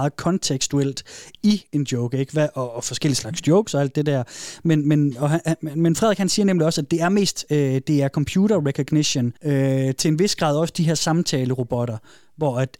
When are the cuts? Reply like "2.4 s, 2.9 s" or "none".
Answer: 9.4 s